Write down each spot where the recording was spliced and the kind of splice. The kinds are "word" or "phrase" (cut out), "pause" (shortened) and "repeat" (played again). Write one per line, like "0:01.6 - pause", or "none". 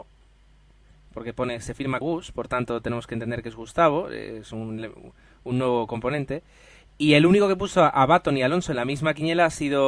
0:02.0 - word